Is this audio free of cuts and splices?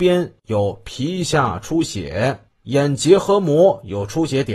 no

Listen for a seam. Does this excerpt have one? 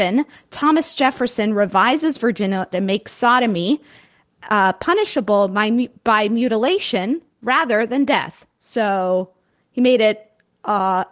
yes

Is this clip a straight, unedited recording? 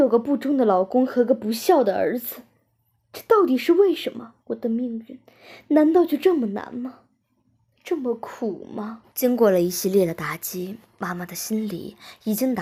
no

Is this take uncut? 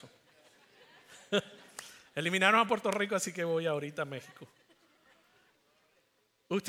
yes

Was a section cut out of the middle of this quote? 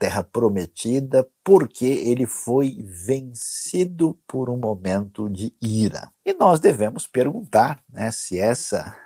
yes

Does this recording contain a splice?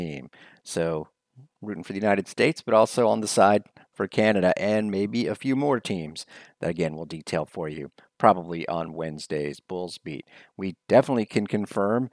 no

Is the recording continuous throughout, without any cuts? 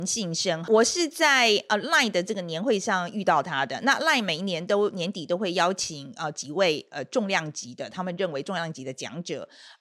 yes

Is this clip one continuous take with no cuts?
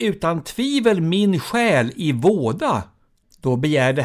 yes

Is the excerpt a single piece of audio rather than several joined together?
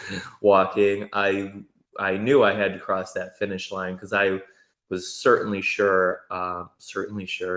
yes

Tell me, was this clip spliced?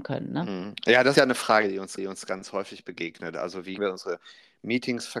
yes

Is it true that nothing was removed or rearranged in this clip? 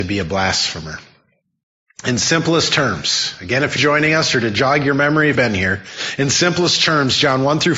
no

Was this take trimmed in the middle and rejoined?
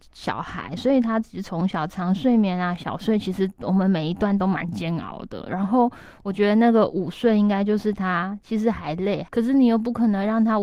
yes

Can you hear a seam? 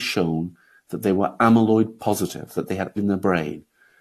yes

